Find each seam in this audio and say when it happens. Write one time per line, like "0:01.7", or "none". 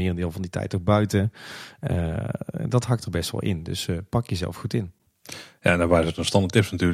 0:05.1